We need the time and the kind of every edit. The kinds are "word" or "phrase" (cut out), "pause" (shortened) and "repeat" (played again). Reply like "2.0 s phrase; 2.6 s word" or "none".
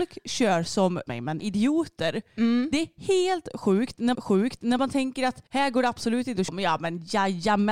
1.1 s word; 1.4 s word; 4.1 s repeat; 5.5 s pause; 6.5 s word